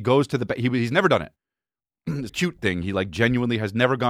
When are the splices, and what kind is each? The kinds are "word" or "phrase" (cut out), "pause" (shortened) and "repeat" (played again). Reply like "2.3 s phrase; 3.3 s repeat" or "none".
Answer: 1.4 s pause; 2.3 s phrase